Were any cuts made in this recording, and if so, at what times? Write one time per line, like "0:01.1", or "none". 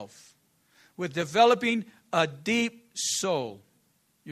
none